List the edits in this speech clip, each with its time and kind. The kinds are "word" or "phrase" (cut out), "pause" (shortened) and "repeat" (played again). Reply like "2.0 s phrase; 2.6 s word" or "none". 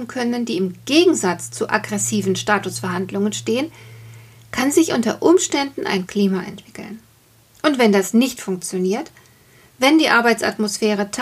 6.1 s word

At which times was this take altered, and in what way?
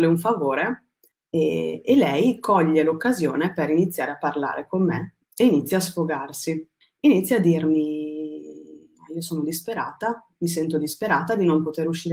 1.1 s pause; 5.2 s pause; 6.8 s pause

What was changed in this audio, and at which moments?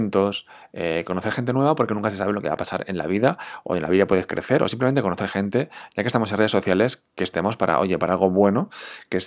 none

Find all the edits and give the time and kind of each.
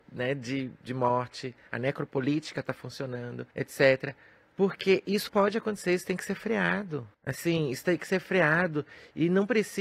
3.5 s pause; 5.3 s word; 7.1 s pause

